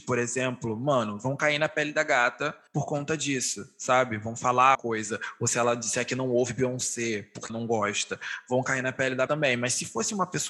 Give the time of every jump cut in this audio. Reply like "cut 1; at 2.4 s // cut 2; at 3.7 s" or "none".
cut 1; at 2.7 s // cut 2; at 4.7 s // cut 3; at 7.5 s // cut 4; at 9.3 s

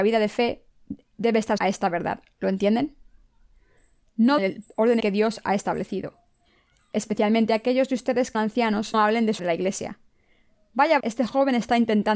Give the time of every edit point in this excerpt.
cut 1; at 1.6 s // cut 2; at 4.4 s // cut 3; at 5.0 s // cut 4; at 8.3 s // cut 5; at 8.9 s // cut 6; at 9.4 s // cut 7; at 11.0 s

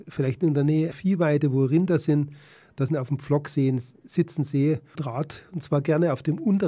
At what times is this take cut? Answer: cut 1; at 0.9 s // cut 2; at 2.9 s // cut 3; at 4.9 s

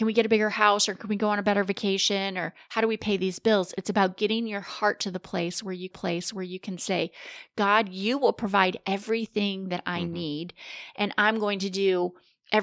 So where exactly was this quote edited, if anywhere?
cut 1; at 5.9 s

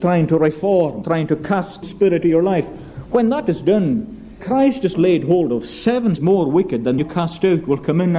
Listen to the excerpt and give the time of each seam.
cut 1; at 1.0 s // cut 2; at 1.8 s // cut 3; at 2.2 s // cut 4; at 4.4 s // cut 5; at 4.9 s // cut 6; at 6.2 s // cut 7; at 7.0 s

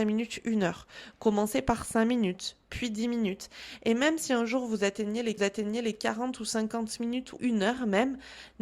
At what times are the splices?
cut 1; at 5.4 s // cut 2; at 7.4 s

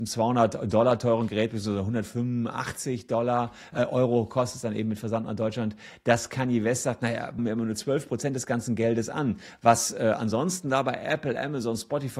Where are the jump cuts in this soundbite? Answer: cut 1; at 7.4 s

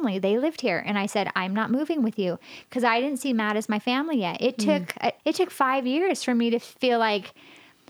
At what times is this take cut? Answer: cut 1; at 5.2 s

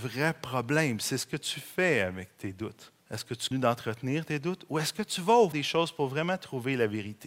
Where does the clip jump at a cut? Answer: cut 1; at 3.0 s // cut 2; at 3.5 s // cut 3; at 5.5 s

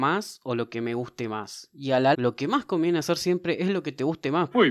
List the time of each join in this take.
cut 1; at 2.1 s

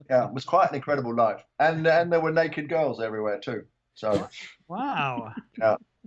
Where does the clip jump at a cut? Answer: none

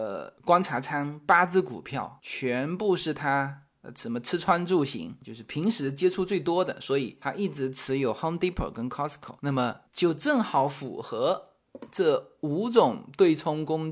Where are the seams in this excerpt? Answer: cut 1; at 9.9 s

